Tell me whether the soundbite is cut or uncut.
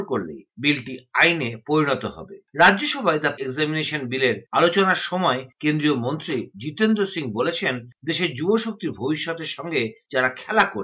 cut